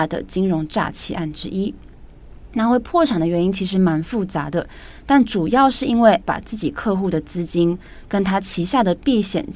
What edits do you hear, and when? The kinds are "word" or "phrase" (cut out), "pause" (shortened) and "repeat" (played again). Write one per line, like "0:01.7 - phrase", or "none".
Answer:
0:06.2 - word